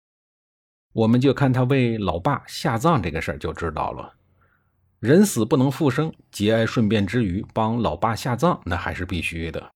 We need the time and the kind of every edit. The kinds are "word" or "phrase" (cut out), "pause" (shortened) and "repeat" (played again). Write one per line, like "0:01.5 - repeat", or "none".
none

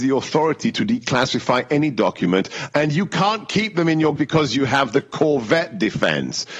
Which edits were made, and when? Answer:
0:04.2 - phrase

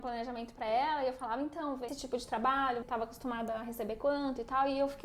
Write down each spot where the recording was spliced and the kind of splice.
0:01.9 - phrase
0:02.8 - word

